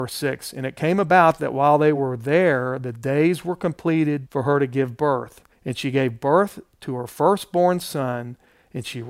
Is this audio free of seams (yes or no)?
yes